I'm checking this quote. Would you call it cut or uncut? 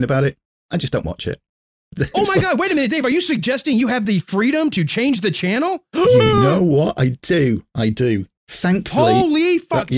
uncut